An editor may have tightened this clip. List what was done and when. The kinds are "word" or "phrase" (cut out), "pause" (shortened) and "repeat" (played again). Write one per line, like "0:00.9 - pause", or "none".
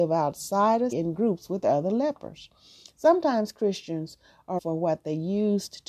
0:00.9 - word
0:04.6 - word